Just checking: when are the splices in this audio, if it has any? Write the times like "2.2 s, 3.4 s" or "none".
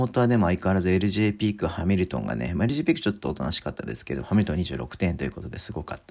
none